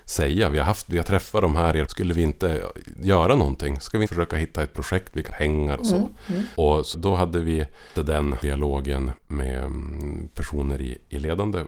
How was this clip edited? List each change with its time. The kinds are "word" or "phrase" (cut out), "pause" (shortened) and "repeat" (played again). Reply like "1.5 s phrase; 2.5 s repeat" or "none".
1.9 s word; 4.1 s word; 5.3 s word; 5.8 s word; 6.9 s word; 8.0 s word; 8.4 s word; 9.2 s word